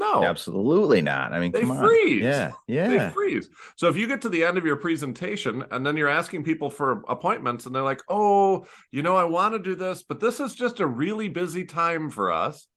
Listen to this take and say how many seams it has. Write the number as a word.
zero